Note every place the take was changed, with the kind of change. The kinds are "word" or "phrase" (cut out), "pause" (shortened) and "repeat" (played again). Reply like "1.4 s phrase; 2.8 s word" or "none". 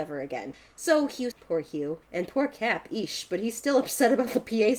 1.3 s phrase; 2.0 s pause